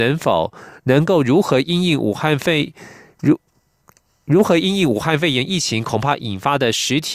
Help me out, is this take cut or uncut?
uncut